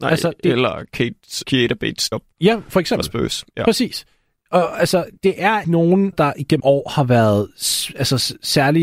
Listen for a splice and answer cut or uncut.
cut